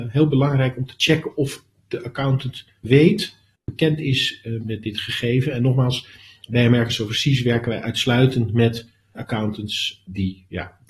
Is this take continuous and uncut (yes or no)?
no